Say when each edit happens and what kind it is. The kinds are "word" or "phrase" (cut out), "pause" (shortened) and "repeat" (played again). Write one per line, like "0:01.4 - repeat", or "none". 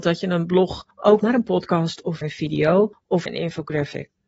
0:01.2 - word
0:02.2 - word
0:03.3 - word